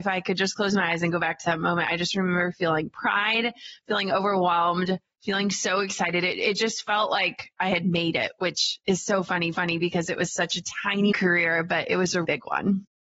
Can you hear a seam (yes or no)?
yes